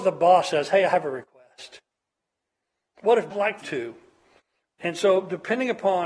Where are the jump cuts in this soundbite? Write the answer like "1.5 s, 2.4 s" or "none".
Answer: 3.3 s, 3.6 s